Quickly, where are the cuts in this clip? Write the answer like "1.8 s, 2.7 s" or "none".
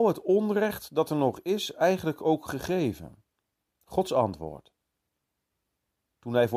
none